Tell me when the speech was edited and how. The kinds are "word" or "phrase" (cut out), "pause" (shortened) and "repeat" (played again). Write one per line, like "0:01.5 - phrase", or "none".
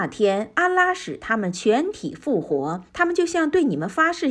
0:02.9 - pause